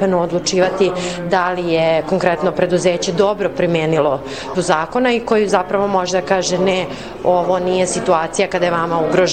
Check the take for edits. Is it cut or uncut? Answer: cut